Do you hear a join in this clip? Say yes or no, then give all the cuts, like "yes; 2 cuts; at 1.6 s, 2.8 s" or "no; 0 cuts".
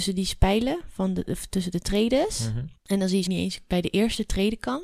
yes; 2 cuts; at 2.8 s, 3.3 s